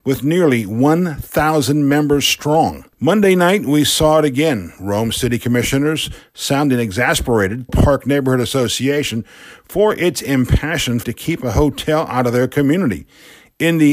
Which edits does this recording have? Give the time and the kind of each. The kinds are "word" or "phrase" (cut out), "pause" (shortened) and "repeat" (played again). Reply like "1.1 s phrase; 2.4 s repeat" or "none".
2.9 s pause; 7.7 s phrase; 11.0 s word